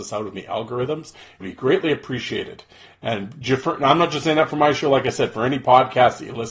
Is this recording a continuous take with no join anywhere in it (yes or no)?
no